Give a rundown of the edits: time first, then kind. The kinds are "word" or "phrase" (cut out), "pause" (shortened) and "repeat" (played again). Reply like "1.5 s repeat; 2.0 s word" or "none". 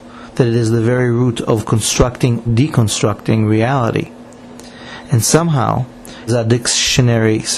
2.5 s word; 6.3 s word